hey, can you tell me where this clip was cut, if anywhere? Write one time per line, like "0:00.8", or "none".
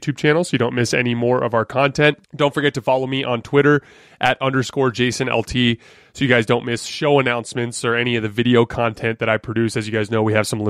0:02.2